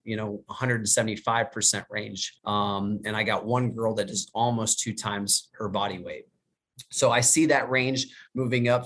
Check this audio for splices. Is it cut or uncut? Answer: cut